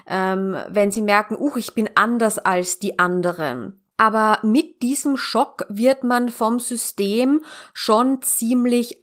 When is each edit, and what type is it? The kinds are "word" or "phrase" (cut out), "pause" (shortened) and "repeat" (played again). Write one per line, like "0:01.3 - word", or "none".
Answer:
0:03.9 - pause